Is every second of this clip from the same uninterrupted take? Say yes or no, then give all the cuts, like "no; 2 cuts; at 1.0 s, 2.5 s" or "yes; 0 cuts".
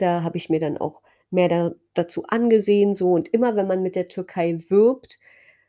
yes; 0 cuts